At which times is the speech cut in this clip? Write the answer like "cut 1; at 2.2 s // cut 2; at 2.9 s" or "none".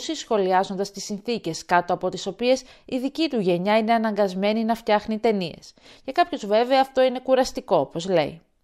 none

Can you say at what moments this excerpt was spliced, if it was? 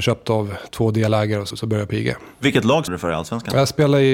cut 1; at 1.5 s // cut 2; at 2.9 s

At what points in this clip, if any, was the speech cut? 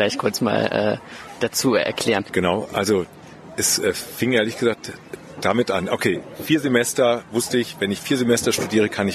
none

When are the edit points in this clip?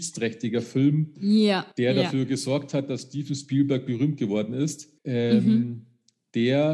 cut 1; at 1.7 s // cut 2; at 5.0 s

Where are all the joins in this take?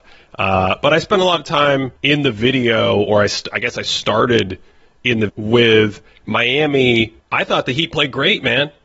cut 1; at 2.0 s // cut 2; at 5.3 s // cut 3; at 7.2 s

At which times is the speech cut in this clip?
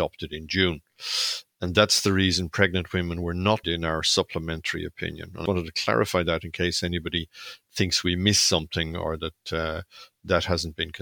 cut 1; at 3.6 s // cut 2; at 5.5 s

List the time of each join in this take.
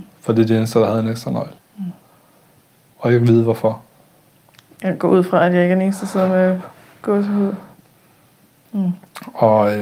cut 1; at 1.6 s

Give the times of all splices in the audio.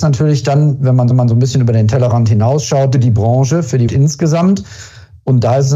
cut 1; at 1.1 s // cut 2; at 2.9 s // cut 3; at 3.9 s

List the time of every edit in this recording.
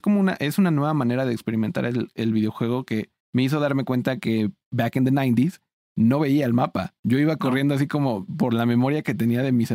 cut 1; at 3.2 s // cut 2; at 5.8 s // cut 3; at 7.0 s

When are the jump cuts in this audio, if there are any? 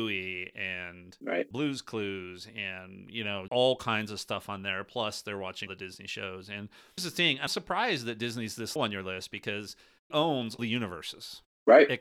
cut 1; at 1.5 s // cut 2; at 3.5 s // cut 3; at 5.7 s // cut 4; at 7.0 s // cut 5; at 7.5 s // cut 6; at 8.8 s // cut 7; at 10.1 s // cut 8; at 10.6 s

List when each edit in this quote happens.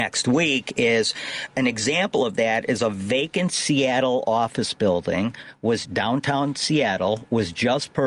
cut 1; at 5.9 s

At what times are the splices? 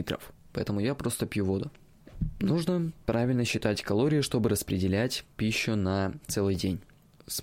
cut 1; at 5.3 s

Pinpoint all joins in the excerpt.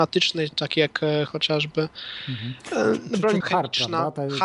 cut 1; at 1.3 s // cut 2; at 3.4 s

